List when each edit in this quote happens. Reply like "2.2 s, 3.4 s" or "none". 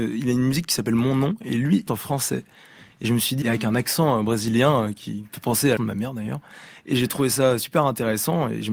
1.9 s, 3.4 s, 5.8 s